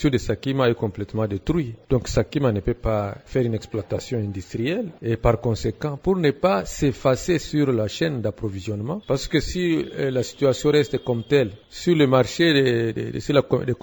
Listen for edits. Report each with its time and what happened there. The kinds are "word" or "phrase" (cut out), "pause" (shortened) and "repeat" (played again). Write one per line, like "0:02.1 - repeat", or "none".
none

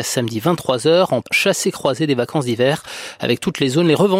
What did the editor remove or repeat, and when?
0:01.2 - word

